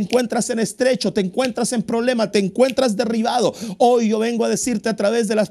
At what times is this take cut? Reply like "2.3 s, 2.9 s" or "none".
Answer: none